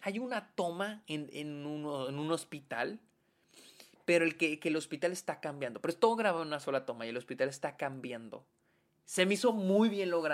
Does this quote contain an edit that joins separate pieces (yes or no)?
no